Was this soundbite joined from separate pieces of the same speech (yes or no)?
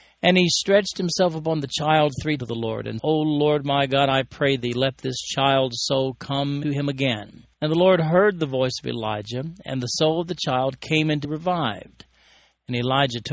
yes